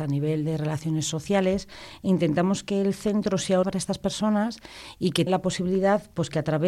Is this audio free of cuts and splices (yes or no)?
no